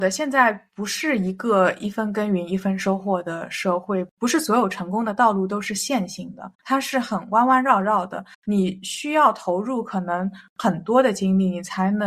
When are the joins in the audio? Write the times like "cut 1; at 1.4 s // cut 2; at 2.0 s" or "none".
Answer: cut 1; at 6.5 s // cut 2; at 8.3 s